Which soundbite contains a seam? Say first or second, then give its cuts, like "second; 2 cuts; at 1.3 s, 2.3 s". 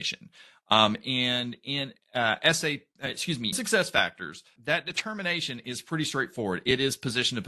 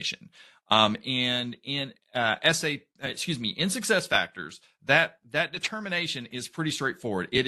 first; 2 cuts; at 3.5 s, 4.6 s